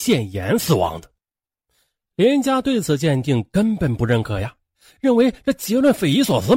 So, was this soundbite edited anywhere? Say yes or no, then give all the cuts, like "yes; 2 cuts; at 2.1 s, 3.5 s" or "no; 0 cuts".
no; 0 cuts